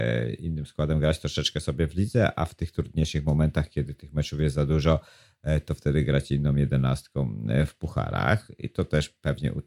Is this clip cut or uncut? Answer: uncut